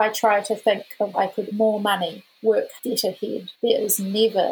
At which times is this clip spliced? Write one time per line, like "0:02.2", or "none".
0:01.1
0:01.5
0:02.8
0:03.5